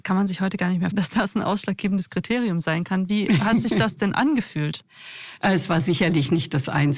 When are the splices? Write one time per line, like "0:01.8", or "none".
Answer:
0:00.9